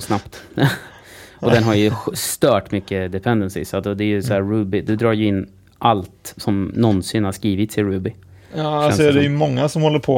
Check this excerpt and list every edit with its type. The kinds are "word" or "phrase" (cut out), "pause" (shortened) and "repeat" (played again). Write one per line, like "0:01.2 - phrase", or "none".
none